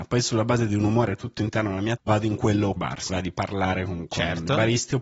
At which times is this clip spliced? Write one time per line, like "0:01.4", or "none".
0:02.0
0:02.8
0:03.1